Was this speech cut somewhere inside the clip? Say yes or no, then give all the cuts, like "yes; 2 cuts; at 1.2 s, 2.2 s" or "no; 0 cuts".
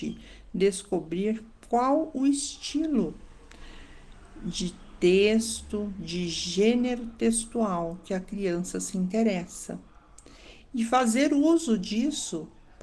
no; 0 cuts